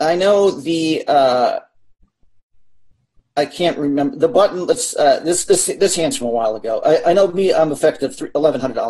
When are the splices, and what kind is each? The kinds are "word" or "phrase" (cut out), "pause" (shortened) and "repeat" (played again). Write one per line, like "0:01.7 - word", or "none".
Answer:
none